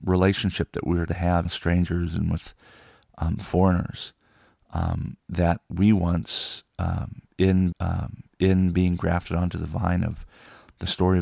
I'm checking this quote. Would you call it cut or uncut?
cut